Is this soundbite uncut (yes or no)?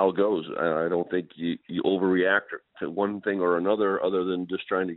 yes